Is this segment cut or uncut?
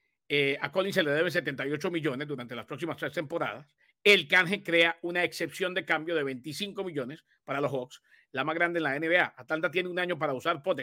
uncut